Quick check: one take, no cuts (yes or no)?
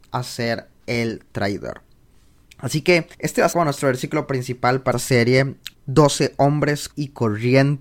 no